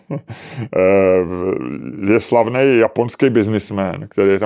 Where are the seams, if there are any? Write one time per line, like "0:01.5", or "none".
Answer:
none